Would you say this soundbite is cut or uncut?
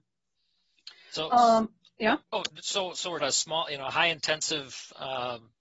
cut